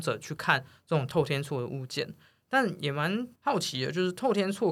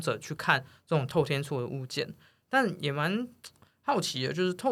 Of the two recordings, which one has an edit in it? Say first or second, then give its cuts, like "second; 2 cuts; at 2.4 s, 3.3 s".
first; 1 cut; at 3.4 s